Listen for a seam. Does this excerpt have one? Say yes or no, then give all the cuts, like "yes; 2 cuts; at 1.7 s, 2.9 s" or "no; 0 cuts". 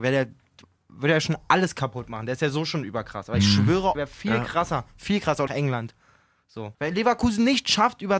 yes; 3 cuts; at 3.9 s, 5.5 s, 6.7 s